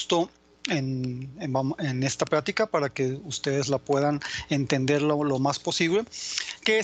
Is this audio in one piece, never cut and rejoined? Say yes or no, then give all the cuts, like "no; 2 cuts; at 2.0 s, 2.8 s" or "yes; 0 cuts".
yes; 0 cuts